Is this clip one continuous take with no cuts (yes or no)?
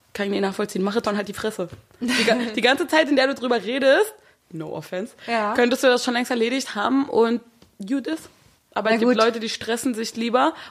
no